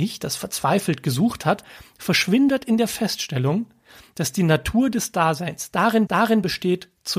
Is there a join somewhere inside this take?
yes; 1 cut; at 6.1 s

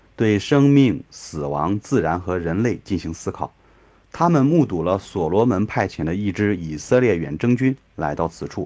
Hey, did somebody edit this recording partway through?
no; 0 cuts

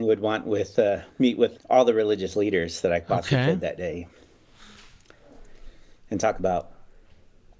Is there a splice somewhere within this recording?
yes; 1 cut; at 1.6 s

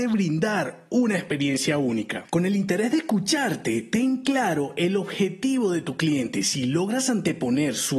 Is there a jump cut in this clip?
no; 0 cuts

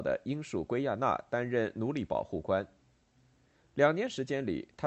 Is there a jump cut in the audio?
no; 0 cuts

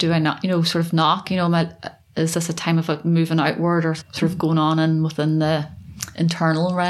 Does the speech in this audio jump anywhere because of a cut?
yes; 2 cuts; at 1.2 s, 4.0 s

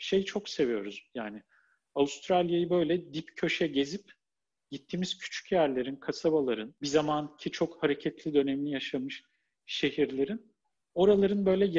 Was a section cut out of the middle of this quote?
no; 0 cuts

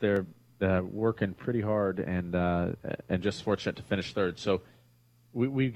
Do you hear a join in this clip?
no; 0 cuts

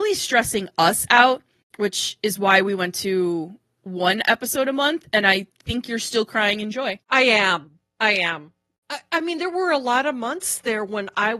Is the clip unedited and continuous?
no; 1 cut; at 7.0 s

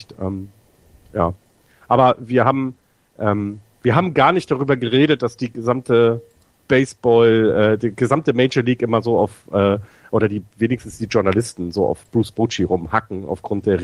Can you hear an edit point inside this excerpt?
no; 0 cuts

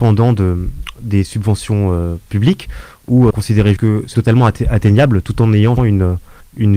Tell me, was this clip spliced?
yes; 4 cuts; at 3.3 s, 3.8 s, 4.1 s, 5.8 s

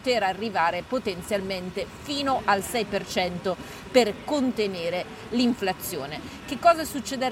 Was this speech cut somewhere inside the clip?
no; 0 cuts

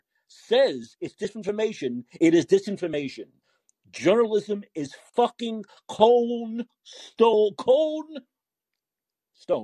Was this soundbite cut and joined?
no; 0 cuts

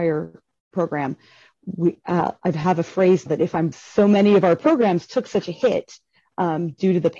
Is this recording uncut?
no; 2 cuts; at 3.3 s, 3.7 s

